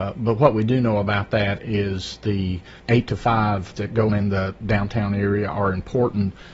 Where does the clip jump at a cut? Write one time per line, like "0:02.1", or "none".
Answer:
0:02.8
0:03.8
0:04.1